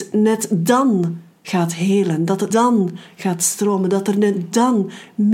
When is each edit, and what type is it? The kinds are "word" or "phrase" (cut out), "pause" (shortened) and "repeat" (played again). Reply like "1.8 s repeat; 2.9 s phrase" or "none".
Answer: 2.5 s word